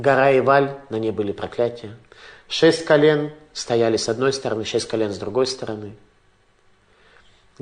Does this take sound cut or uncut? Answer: uncut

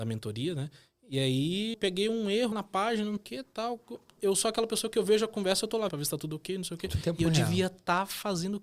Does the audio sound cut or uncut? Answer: cut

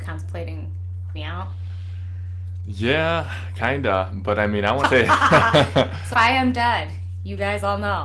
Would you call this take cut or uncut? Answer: cut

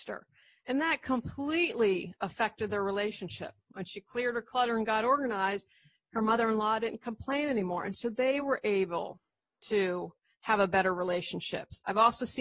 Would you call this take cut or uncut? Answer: uncut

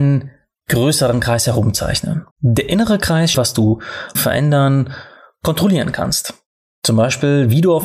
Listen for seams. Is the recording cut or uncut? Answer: cut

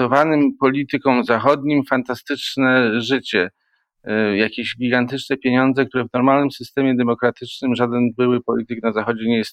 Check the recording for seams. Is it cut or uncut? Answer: uncut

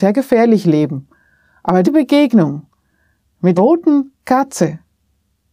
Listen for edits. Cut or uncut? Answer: cut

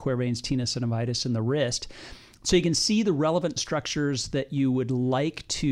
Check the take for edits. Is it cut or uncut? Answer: uncut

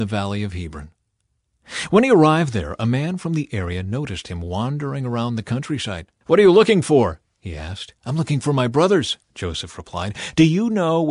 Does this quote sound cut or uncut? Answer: cut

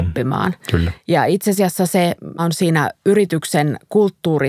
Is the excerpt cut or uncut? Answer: cut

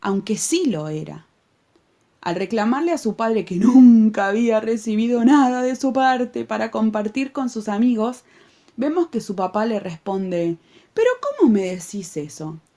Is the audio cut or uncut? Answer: uncut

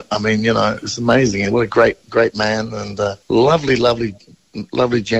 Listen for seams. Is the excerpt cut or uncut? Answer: cut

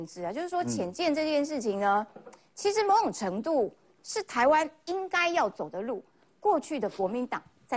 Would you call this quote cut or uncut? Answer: uncut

